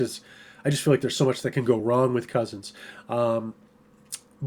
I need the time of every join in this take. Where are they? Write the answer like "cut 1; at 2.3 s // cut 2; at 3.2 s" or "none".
none